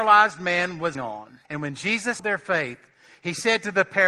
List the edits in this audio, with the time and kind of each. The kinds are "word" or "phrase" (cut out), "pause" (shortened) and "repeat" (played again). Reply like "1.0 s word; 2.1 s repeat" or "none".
0.9 s word; 1.4 s pause; 2.2 s word